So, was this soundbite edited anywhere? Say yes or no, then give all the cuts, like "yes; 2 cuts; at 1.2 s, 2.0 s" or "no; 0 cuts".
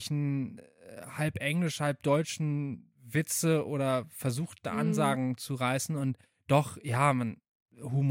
no; 0 cuts